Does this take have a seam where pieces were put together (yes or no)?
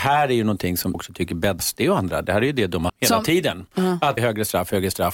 yes